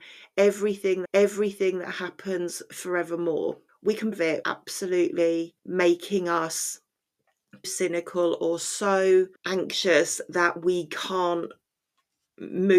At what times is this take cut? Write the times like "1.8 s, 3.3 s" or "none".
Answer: 1.1 s, 3.7 s, 4.1 s, 4.4 s, 5.6 s, 7.6 s, 9.4 s

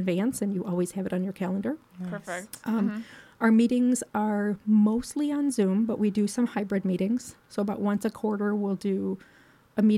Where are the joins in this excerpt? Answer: none

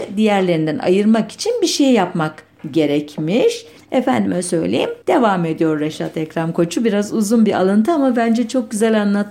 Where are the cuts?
3.8 s, 5.0 s

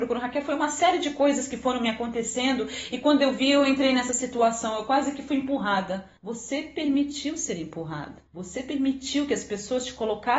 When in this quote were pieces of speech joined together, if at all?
6.2 s, 8.3 s

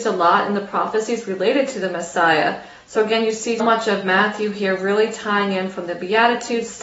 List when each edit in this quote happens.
3.6 s

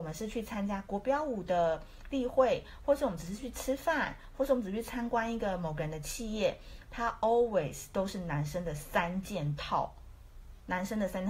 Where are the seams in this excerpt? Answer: none

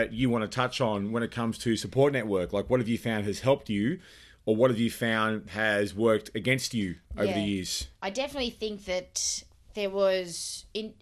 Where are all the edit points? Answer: none

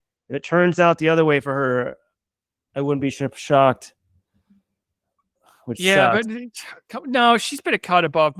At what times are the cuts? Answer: none

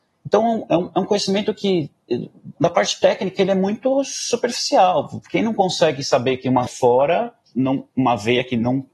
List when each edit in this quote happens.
6.7 s, 7.5 s

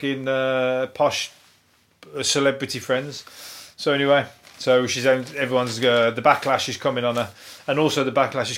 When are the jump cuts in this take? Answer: none

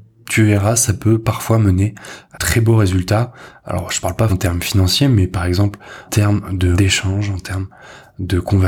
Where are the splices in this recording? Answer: 2.3 s, 4.3 s, 6.1 s, 6.7 s

